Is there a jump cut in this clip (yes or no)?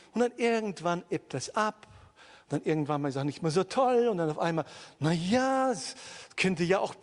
no